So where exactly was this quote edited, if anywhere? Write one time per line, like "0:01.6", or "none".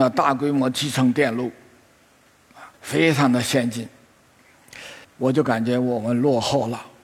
0:02.7
0:05.0